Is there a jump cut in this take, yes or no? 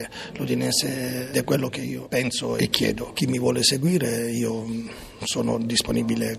yes